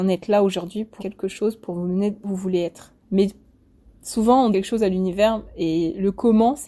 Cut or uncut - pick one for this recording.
cut